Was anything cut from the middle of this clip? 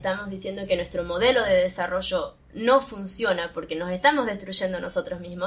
no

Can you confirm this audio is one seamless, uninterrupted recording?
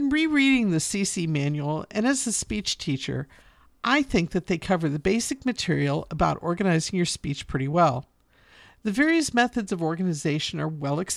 yes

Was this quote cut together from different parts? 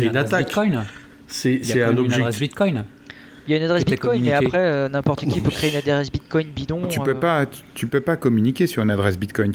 no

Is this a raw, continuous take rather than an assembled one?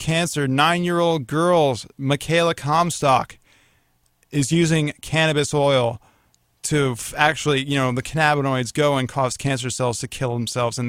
yes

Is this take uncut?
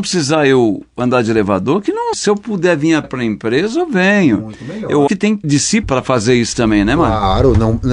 no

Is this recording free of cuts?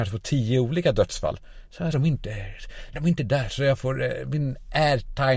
no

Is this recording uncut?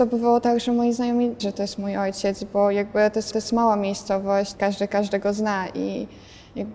no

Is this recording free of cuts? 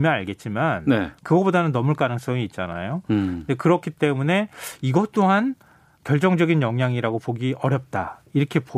yes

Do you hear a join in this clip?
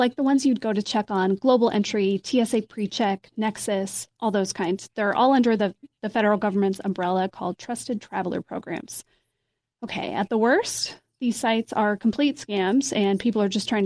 no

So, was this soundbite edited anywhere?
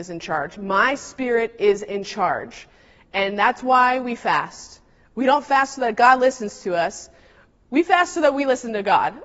no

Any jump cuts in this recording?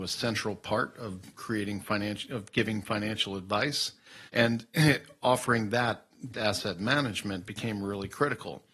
yes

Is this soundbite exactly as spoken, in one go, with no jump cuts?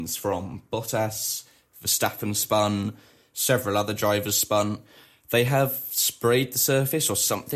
yes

